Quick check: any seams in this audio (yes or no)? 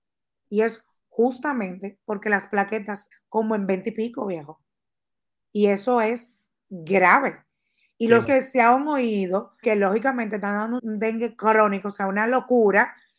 yes